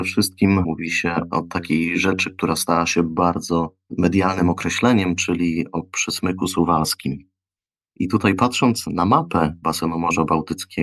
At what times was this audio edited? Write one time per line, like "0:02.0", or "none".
none

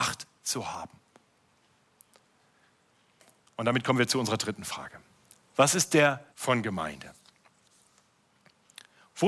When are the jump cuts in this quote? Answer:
0:06.3

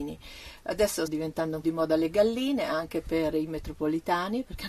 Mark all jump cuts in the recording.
0:01.1
0:01.6

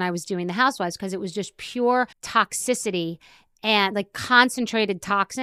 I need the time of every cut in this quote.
0:02.1

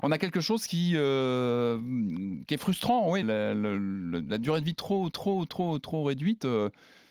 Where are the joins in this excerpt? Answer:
0:03.2
0:05.1

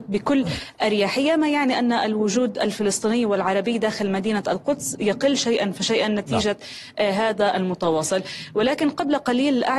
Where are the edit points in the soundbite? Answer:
0:07.5

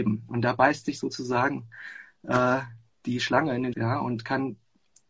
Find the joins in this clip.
0:02.9
0:03.7

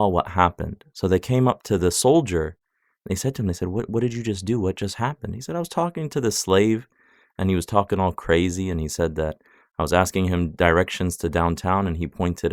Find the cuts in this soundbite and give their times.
none

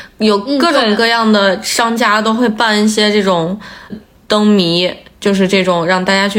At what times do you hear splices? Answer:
0:03.9

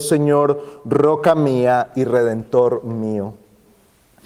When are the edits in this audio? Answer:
none

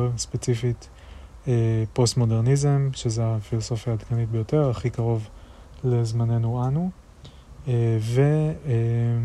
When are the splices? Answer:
none

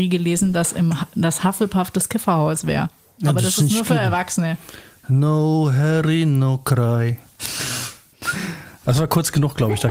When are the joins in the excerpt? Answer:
none

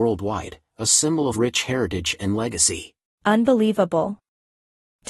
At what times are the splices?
0:01.3
0:03.1

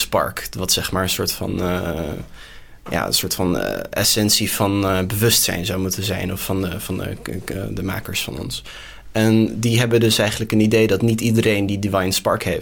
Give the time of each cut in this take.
none

